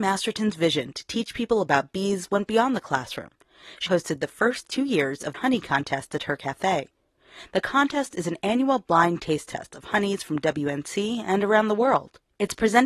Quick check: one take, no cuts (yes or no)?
no